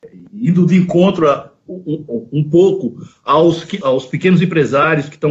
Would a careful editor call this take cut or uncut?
cut